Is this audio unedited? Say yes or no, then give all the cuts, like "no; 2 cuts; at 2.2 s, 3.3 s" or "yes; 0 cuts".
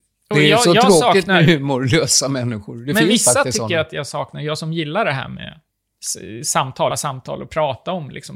no; 1 cut; at 6.9 s